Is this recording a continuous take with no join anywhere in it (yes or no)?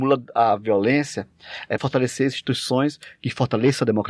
no